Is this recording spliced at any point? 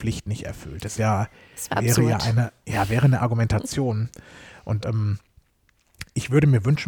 yes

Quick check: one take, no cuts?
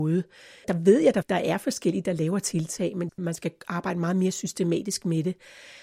yes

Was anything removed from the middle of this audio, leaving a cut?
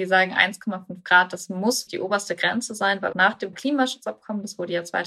yes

